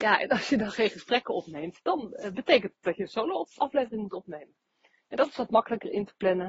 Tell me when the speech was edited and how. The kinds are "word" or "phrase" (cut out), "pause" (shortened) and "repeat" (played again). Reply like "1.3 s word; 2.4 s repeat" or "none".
none